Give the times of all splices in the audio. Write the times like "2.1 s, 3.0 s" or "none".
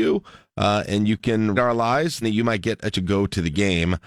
1.6 s, 2.2 s, 2.9 s